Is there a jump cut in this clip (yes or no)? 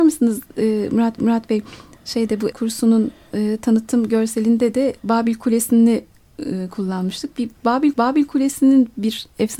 yes